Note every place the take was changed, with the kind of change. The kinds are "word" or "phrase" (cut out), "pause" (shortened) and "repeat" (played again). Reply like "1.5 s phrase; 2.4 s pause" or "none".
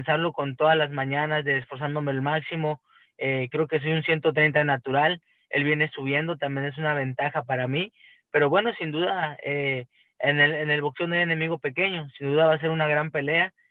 none